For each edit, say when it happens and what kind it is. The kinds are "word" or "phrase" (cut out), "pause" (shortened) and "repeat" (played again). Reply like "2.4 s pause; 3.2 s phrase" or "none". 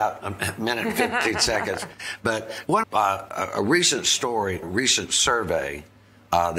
2.8 s phrase; 4.6 s word